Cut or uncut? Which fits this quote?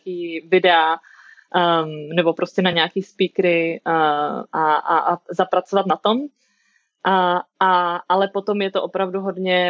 uncut